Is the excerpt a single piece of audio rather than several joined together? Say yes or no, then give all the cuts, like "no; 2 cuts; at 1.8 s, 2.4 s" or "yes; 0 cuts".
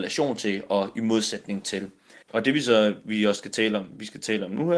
no; 1 cut; at 2.2 s